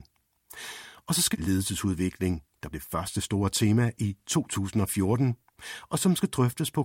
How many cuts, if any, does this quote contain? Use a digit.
2